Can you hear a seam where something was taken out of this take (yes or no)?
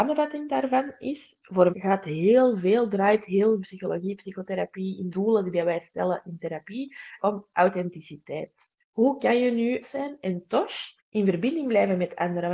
yes